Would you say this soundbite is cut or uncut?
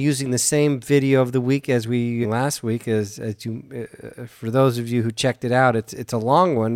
cut